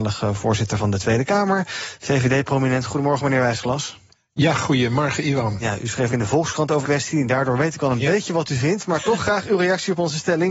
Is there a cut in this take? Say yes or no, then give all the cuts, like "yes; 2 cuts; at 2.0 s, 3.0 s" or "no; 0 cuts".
yes; 3 cuts; at 4.1 s, 6.1 s, 6.8 s